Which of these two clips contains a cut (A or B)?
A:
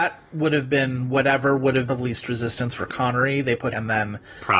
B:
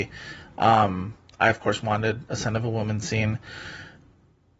A